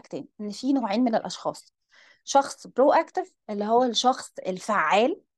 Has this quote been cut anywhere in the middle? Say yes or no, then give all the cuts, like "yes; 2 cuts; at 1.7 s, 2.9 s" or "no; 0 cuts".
no; 0 cuts